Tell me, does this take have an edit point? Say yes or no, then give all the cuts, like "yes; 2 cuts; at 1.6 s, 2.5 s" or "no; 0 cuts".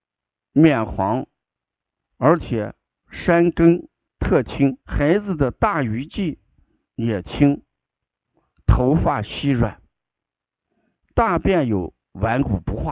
yes; 1 cut; at 4.8 s